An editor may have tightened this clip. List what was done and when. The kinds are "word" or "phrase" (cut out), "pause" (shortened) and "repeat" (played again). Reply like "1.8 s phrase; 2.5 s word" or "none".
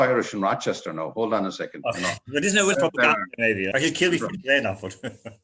2.7 s phrase; 3.7 s word